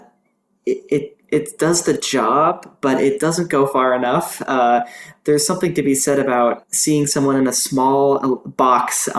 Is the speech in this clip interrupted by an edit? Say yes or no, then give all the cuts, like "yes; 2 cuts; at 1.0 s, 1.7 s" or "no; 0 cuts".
no; 0 cuts